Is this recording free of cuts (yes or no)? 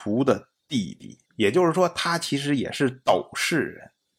no